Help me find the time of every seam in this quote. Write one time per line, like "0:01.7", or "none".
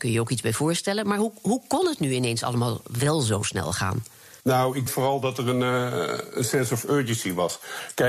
0:04.4
0:04.9

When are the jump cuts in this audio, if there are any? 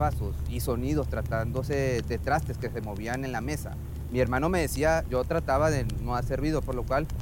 0:02.0
0:05.1

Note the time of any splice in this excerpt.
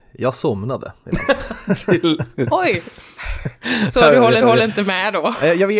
0:04.4

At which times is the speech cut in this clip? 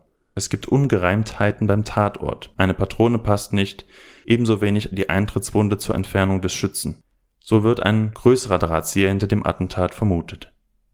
none

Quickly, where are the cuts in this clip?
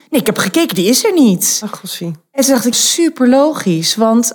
0:02.7

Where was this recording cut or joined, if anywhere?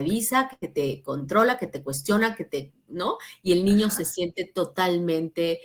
none

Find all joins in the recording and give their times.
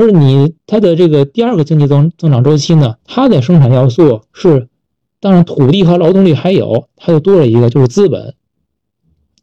0:03.0
0:04.3

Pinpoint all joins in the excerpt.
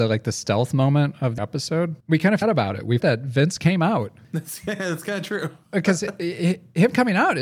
0:01.4
0:02.0
0:02.4
0:03.0

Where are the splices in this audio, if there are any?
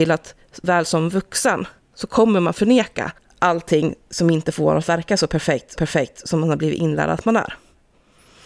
0:03.2
0:05.8

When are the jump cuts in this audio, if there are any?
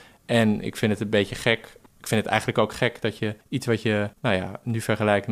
0:01.9
0:03.4
0:04.1

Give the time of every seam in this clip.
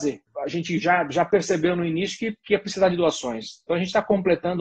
none

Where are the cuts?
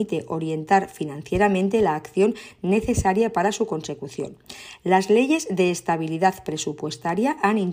none

